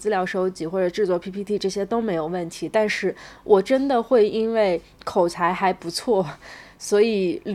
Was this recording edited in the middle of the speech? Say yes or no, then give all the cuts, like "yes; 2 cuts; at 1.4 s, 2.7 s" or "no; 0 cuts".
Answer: no; 0 cuts